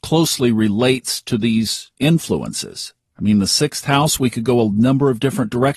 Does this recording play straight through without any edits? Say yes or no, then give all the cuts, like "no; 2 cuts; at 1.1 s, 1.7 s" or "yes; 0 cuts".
yes; 0 cuts